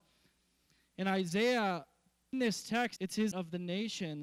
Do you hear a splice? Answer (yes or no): yes